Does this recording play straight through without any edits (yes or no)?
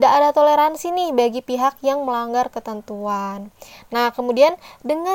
yes